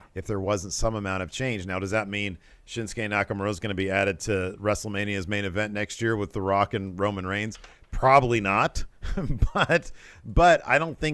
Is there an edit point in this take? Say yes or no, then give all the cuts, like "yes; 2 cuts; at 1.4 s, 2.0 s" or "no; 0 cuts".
no; 0 cuts